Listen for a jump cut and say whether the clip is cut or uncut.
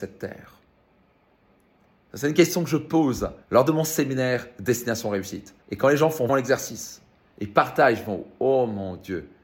cut